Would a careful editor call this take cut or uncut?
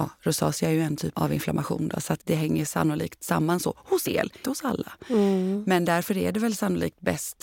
cut